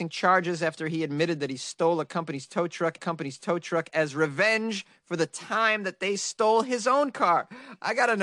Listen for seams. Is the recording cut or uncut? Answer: cut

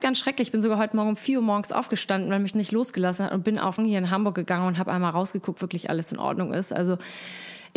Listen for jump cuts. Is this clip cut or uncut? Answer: cut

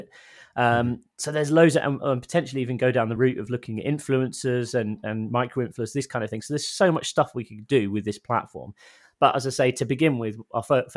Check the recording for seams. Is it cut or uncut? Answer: uncut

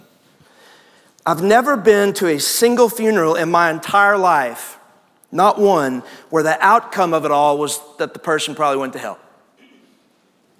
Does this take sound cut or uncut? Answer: uncut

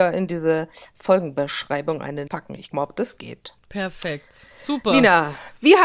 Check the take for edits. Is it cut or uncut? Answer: cut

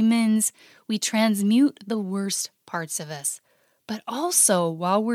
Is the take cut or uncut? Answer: uncut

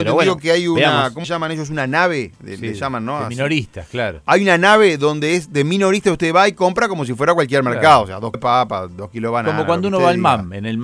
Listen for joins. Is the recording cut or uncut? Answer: cut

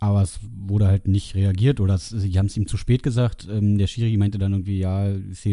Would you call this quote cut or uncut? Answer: uncut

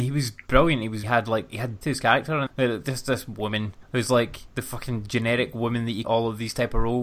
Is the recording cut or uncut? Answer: cut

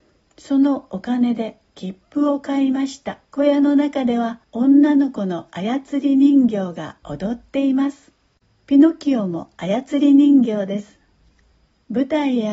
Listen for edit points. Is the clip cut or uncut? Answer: cut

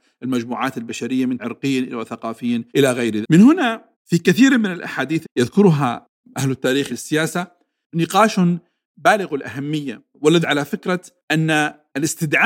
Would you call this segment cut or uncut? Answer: cut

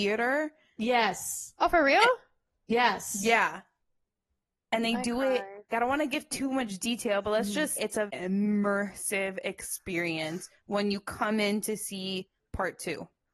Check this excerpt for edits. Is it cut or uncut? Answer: cut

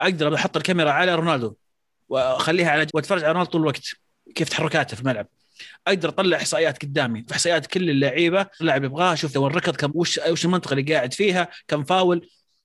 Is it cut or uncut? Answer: cut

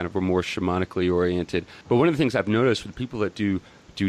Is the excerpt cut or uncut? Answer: cut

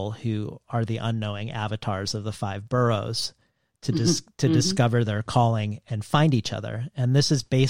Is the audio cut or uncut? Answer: uncut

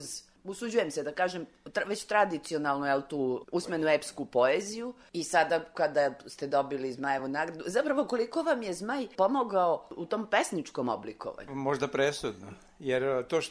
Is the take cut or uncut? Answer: uncut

